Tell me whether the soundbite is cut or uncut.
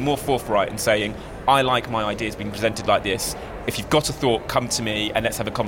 uncut